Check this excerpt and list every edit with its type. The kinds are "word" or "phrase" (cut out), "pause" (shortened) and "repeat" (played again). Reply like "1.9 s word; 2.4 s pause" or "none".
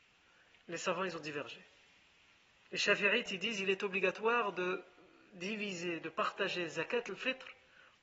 none

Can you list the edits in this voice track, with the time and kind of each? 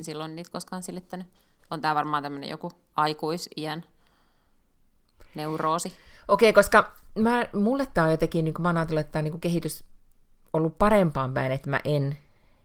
none

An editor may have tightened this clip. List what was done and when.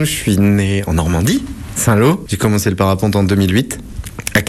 1.8 s word

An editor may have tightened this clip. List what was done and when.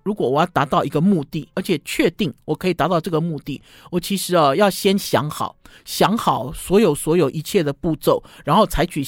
1.5 s word

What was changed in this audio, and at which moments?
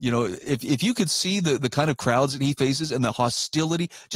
none

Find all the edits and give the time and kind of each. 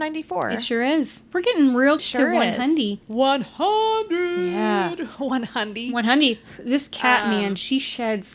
1.3 s pause; 2.0 s word; 3.0 s pause

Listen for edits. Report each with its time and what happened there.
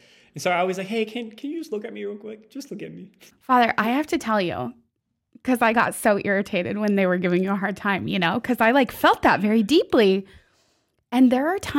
none

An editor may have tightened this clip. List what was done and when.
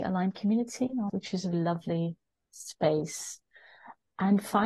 1.1 s phrase; 1.5 s word

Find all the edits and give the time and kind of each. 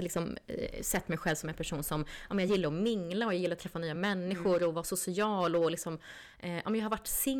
none

